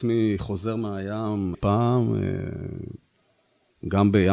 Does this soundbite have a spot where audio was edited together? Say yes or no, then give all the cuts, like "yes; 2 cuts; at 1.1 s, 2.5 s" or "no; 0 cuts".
yes; 1 cut; at 1.5 s